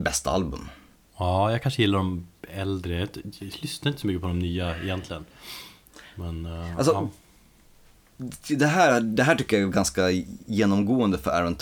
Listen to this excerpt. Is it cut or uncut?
uncut